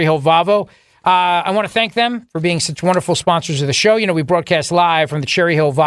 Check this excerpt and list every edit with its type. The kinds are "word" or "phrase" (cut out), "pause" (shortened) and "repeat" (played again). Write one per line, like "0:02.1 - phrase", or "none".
none